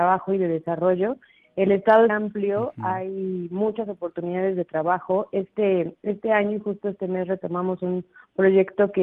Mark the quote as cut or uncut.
cut